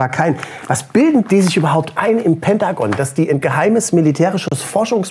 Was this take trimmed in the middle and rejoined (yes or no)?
no